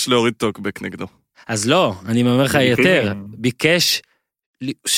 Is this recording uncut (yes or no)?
yes